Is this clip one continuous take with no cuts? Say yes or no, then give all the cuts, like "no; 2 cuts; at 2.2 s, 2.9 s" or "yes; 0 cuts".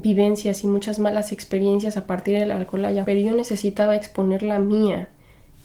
no; 1 cut; at 3.0 s